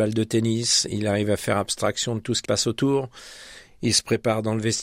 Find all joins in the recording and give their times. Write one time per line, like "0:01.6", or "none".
0:02.4